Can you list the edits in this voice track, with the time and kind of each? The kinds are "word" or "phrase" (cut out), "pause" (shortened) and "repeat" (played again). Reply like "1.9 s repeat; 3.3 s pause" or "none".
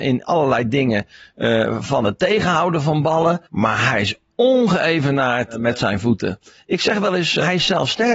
3.5 s pause